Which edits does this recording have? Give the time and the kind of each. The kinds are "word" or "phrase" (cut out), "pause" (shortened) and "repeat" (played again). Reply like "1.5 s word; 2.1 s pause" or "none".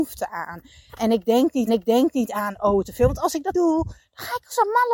1.7 s repeat; 2.8 s word; 3.5 s word